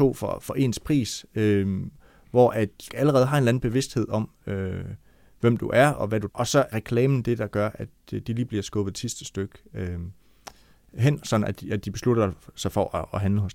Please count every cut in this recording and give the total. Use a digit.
3